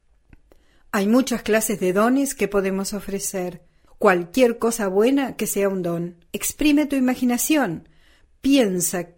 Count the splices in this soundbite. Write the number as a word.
two